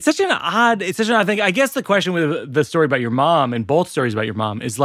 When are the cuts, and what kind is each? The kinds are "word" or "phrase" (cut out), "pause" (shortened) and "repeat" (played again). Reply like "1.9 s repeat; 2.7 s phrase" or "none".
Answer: none